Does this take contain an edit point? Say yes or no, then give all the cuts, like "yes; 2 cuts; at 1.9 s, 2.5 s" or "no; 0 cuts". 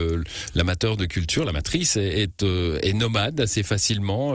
no; 0 cuts